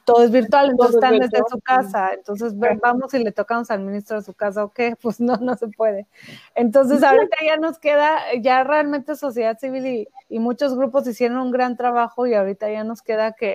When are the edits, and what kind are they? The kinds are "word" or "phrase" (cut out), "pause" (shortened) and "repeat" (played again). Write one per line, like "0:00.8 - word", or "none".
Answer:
0:10.2 - pause